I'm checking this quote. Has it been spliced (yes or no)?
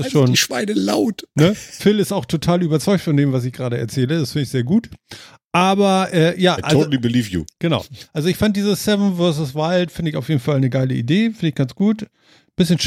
no